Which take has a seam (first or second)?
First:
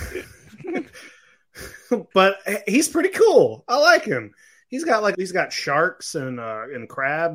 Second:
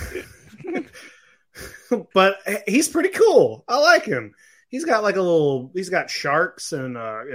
first